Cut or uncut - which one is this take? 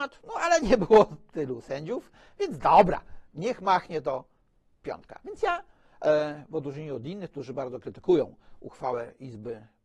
uncut